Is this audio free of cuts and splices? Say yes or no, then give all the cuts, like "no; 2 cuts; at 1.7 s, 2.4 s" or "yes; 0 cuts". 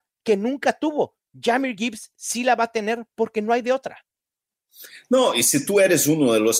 yes; 0 cuts